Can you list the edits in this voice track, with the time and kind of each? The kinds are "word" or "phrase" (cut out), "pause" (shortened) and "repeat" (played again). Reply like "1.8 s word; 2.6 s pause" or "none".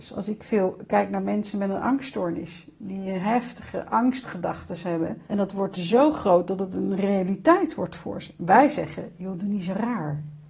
5.2 s pause

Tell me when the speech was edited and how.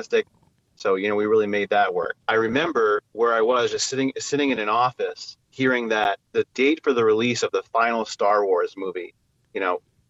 2.2 s pause; 5.4 s pause

